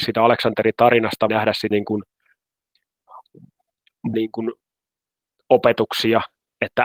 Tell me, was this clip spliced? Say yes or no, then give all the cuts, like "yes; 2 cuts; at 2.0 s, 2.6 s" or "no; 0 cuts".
yes; 3 cuts; at 1.3 s, 1.7 s, 4.1 s